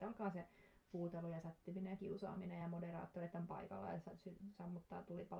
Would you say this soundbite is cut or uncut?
uncut